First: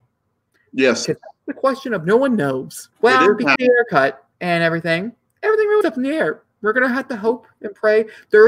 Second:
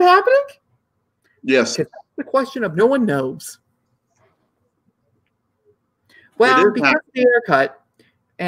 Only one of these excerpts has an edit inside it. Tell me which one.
first; 5 cuts; at 2.9 s, 3.6 s, 4.3 s, 5.3 s, 5.8 s

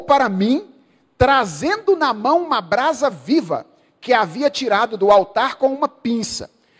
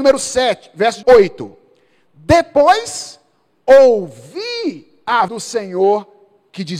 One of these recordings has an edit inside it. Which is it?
second; 2 cuts; at 1.0 s, 5.3 s

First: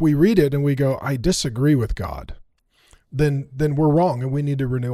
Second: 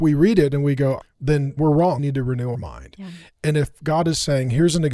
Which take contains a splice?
second; 4 cuts; at 1.0 s, 1.6 s, 2.0 s, 2.5 s

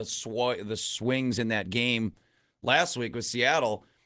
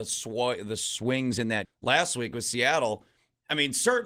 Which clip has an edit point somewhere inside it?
second; 1 cut; at 1.6 s

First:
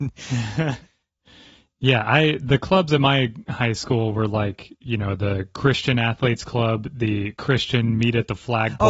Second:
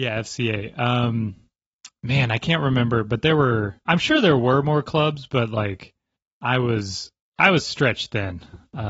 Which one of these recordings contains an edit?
second; 2 cuts; at 3.8 s, 6.2 s

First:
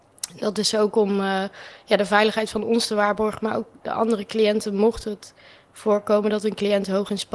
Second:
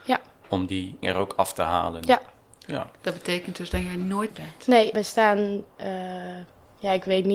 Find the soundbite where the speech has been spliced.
second; 4 cuts; at 1.0 s, 3.0 s, 4.3 s, 4.9 s

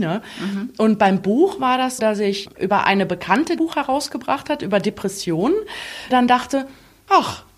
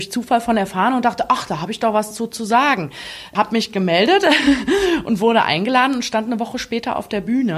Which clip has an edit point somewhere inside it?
first; 3 cuts; at 2.0 s, 3.6 s, 6.1 s

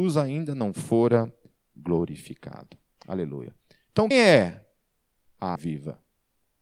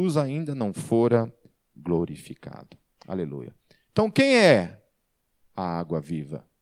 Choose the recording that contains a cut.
first; 2 cuts; at 4.1 s, 5.6 s

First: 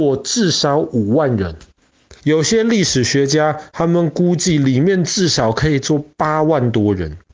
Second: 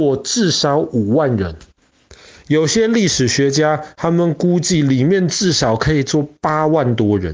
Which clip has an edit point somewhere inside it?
first; 1 cut; at 2.2 s

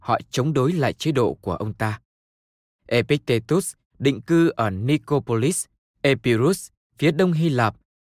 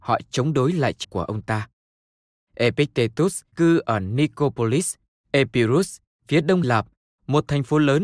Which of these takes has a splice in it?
second; 3 cuts; at 1.0 s, 3.5 s, 6.6 s

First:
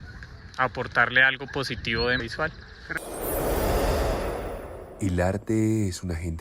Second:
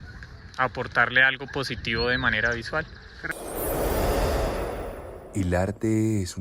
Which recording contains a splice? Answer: first; 1 cut; at 2.2 s

